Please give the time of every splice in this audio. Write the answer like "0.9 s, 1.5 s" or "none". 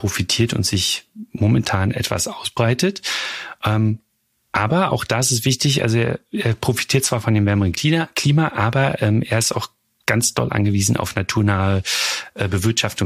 none